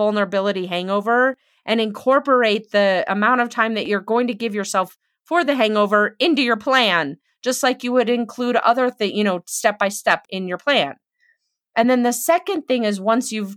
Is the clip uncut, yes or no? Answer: yes